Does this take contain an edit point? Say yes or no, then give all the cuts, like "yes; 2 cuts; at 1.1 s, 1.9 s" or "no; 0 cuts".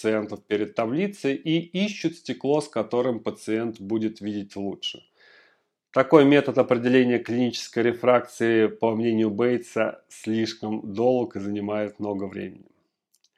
no; 0 cuts